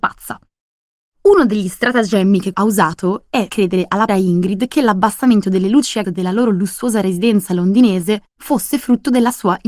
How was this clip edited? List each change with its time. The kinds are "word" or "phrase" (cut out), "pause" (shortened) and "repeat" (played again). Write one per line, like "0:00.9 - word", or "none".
0:02.5 - phrase
0:03.5 - word
0:04.1 - word
0:06.0 - word
0:08.3 - pause